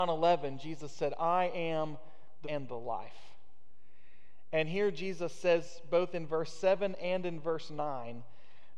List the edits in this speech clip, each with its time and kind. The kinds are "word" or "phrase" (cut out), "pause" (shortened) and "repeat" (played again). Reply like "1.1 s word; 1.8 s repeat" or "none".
2.4 s word